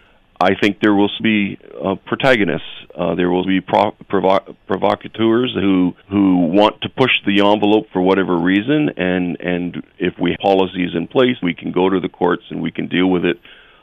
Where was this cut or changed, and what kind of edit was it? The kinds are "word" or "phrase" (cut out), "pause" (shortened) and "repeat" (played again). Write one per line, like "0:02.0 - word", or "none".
0:01.2 - word
0:03.4 - word
0:06.0 - pause
0:10.4 - phrase
0:11.4 - word